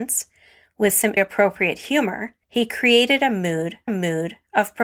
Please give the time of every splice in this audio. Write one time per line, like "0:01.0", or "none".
0:01.2
0:02.4
0:03.9